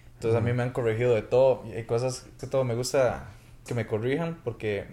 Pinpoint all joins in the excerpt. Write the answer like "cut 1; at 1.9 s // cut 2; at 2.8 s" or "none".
cut 1; at 2.4 s // cut 2; at 3.7 s